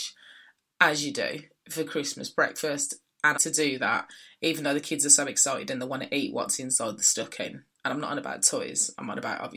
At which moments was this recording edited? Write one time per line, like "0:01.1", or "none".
0:03.4